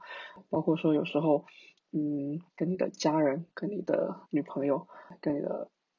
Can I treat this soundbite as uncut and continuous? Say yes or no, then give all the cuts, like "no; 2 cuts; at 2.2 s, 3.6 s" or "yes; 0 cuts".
no; 2 cuts; at 2.5 s, 4.2 s